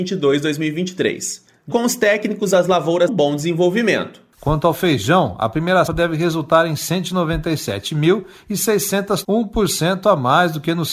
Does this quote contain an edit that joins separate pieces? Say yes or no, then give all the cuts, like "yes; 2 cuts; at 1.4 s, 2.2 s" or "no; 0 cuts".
yes; 4 cuts; at 1.7 s, 3.1 s, 5.9 s, 9.2 s